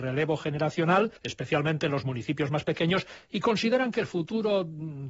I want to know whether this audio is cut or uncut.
cut